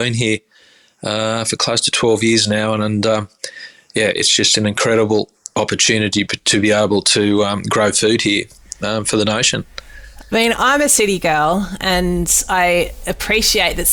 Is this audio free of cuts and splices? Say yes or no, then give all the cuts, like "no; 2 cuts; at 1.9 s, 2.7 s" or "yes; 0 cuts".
yes; 0 cuts